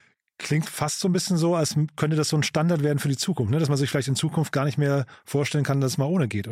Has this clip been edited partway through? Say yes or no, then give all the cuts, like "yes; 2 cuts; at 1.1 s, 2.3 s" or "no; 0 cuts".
no; 0 cuts